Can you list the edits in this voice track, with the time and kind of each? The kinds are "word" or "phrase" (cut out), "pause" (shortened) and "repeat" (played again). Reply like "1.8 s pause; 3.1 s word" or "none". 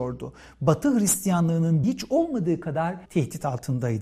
1.8 s word; 3.0 s pause